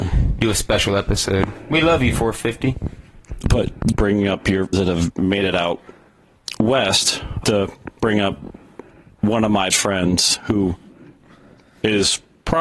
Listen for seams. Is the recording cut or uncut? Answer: cut